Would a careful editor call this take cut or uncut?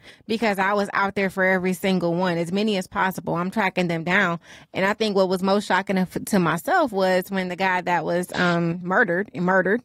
uncut